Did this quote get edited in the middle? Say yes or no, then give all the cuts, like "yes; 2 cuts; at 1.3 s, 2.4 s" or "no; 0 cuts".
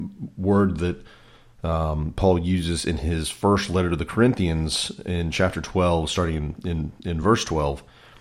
no; 0 cuts